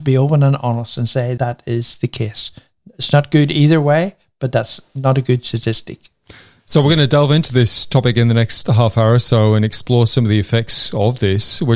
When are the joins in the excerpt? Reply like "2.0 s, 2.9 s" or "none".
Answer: 1.4 s